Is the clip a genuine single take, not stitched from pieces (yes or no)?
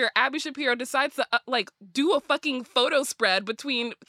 yes